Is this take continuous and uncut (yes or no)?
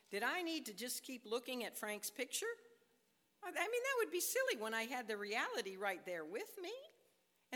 yes